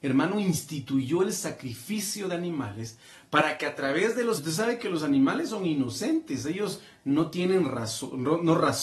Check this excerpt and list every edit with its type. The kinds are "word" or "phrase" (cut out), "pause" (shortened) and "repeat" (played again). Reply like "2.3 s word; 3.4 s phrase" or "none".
4.4 s word